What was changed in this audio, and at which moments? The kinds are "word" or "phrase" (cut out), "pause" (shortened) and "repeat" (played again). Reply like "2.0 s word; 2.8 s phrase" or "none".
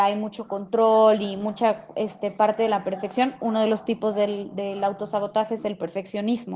none